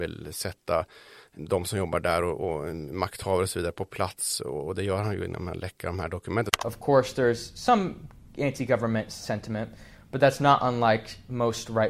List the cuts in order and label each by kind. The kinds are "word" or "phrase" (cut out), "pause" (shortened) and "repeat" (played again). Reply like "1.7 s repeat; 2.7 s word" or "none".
none